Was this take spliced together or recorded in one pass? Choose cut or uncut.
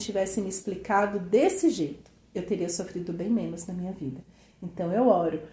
uncut